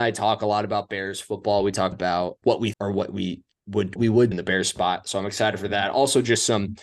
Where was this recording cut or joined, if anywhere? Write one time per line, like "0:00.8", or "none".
0:01.9
0:02.4
0:02.7
0:04.0
0:04.3